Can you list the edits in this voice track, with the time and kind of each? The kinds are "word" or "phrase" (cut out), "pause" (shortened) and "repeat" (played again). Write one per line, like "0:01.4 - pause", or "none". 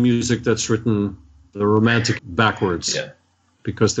0:01.5 - word
0:02.2 - word